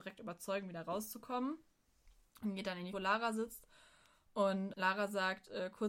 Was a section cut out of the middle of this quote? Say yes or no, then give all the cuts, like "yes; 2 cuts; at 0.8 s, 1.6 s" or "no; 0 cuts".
yes; 2 cuts; at 2.9 s, 4.7 s